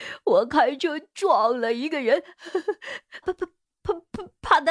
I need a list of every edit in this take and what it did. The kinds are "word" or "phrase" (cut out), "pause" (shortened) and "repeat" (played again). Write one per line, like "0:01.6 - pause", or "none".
0:03.2 - word